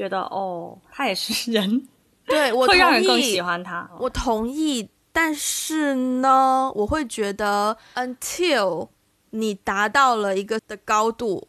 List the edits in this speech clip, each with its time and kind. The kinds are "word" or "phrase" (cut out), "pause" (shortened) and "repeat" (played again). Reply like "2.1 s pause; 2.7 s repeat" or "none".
10.6 s word